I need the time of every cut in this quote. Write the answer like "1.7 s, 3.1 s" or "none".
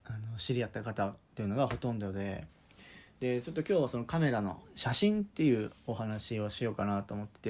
none